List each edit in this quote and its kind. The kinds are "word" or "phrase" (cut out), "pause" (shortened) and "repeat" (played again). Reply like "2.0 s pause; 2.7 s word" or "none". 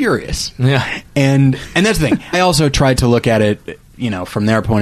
2.3 s word